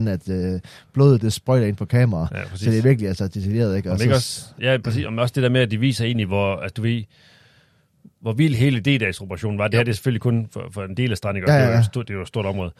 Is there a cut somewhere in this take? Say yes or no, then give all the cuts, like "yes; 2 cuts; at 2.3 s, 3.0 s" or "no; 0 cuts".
no; 0 cuts